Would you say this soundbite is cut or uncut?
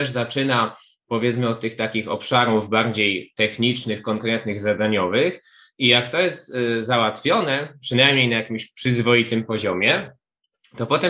uncut